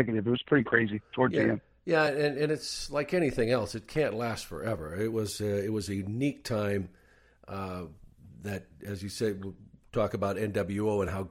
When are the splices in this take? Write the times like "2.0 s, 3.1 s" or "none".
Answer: none